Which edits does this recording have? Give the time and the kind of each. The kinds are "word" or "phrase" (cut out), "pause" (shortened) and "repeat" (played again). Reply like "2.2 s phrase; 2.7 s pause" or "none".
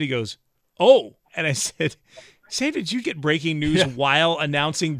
1.2 s pause; 3.0 s word